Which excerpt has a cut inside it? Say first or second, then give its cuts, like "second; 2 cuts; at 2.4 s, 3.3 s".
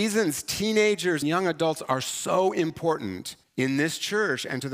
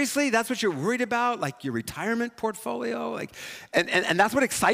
first; 2 cuts; at 1.2 s, 3.4 s